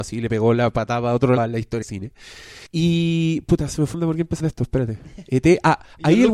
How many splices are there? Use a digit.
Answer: 5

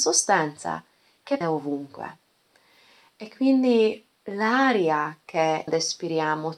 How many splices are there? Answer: 3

